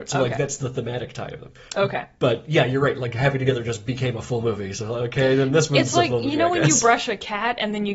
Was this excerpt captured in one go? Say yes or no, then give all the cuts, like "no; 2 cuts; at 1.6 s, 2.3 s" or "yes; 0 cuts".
yes; 0 cuts